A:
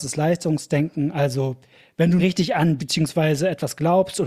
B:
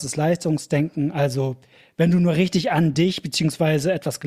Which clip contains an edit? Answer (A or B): A